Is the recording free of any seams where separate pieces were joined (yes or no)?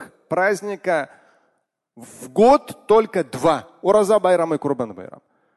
no